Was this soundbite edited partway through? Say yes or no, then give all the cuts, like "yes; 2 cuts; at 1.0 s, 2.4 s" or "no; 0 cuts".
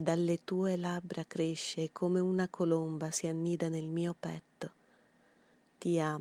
no; 0 cuts